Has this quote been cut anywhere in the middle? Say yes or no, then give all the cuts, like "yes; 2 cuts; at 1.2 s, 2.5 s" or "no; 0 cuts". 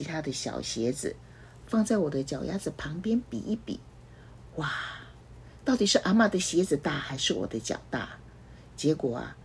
no; 0 cuts